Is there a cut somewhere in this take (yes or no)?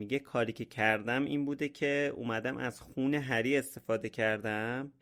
no